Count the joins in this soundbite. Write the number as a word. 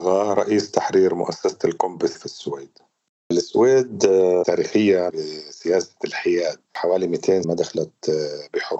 four